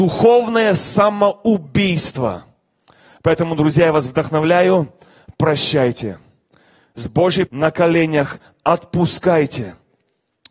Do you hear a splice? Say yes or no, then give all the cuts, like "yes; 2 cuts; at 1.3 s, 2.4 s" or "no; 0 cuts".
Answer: yes; 1 cut; at 7.5 s